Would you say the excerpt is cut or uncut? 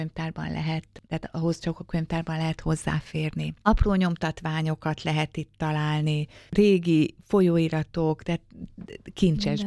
uncut